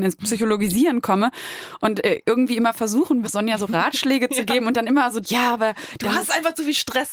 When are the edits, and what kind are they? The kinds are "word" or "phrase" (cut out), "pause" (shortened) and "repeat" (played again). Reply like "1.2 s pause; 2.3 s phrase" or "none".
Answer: 3.2 s word; 5.2 s word

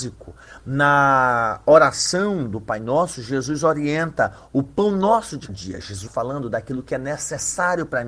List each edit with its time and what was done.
5.5 s word; 6.1 s word

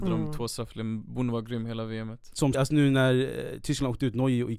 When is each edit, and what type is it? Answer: 2.5 s word

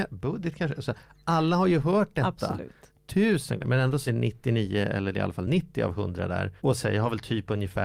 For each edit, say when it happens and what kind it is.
3.6 s word; 4.1 s word; 6.6 s pause

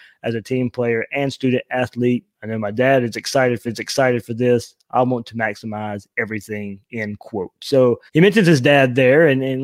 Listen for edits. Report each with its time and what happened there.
3.7 s repeat; 8.1 s pause

